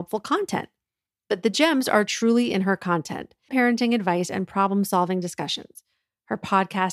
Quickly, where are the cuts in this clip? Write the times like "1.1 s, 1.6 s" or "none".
3.5 s